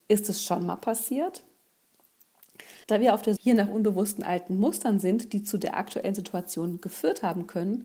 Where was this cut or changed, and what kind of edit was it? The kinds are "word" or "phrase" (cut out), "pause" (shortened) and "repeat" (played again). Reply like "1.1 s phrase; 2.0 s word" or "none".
2.8 s pause; 3.4 s word